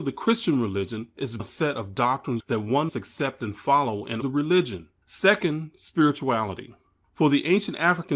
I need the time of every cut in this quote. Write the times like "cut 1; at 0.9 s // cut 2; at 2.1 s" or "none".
cut 1; at 1.4 s // cut 2; at 2.4 s // cut 3; at 2.9 s // cut 4; at 4.2 s // cut 5; at 5.0 s